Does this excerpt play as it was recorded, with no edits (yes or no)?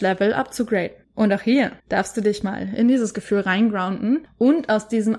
no